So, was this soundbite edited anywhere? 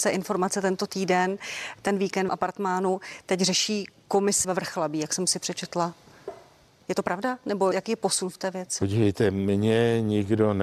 yes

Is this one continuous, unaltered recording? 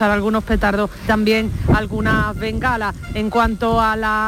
no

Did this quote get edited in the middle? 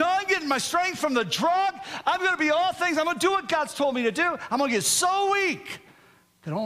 no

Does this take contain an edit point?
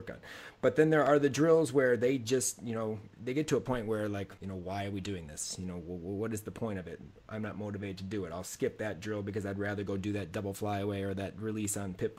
yes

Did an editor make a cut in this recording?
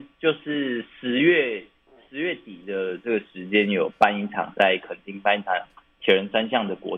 no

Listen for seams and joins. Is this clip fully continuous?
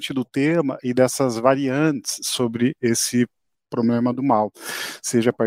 yes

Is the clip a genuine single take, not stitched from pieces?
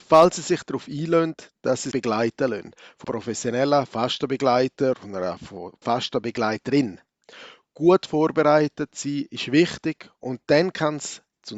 no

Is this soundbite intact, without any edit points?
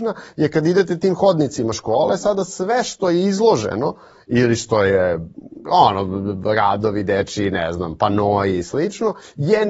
yes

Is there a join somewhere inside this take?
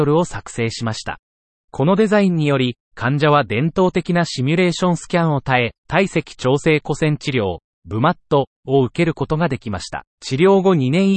yes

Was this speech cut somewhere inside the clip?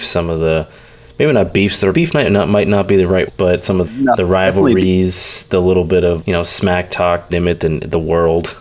yes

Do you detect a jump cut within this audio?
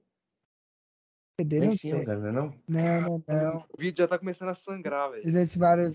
yes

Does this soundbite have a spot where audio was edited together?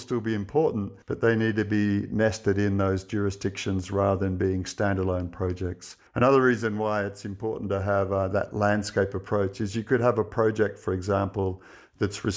yes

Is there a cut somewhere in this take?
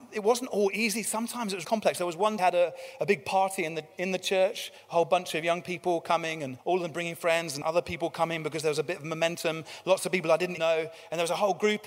yes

